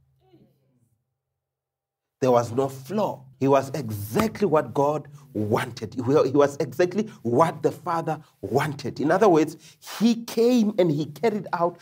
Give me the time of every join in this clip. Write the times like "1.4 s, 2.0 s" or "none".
3.3 s